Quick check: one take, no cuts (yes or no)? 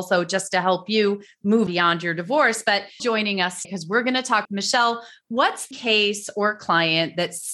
no